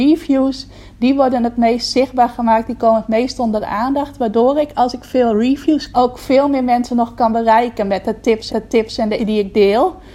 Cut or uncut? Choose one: cut